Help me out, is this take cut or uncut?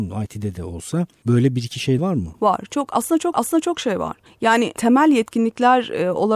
cut